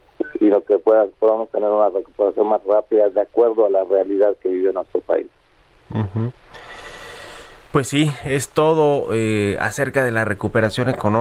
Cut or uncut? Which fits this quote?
uncut